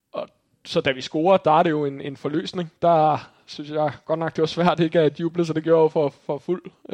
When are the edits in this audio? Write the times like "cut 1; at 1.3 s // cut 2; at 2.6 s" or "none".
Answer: none